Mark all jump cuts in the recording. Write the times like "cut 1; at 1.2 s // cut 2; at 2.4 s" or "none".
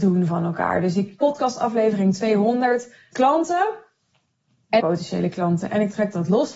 cut 1; at 1.2 s // cut 2; at 3.1 s // cut 3; at 4.8 s